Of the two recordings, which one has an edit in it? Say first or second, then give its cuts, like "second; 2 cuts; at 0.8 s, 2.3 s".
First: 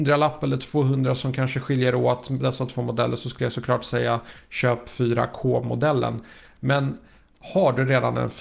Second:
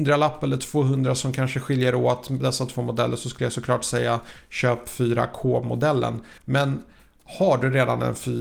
second; 1 cut; at 6.4 s